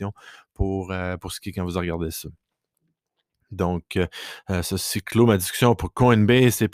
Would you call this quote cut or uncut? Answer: uncut